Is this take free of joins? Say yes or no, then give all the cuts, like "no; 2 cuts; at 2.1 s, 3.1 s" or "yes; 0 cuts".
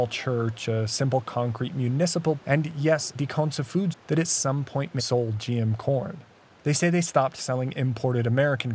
no; 4 cuts; at 2.4 s, 3.2 s, 3.9 s, 5.0 s